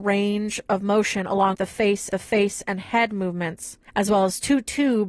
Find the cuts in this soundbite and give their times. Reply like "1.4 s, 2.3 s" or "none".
1.5 s, 2.1 s, 3.9 s